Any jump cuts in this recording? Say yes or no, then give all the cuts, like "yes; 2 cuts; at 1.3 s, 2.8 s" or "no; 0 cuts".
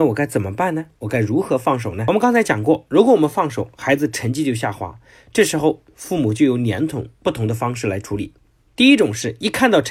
no; 0 cuts